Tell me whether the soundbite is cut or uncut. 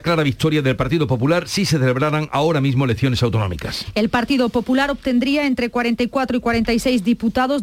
uncut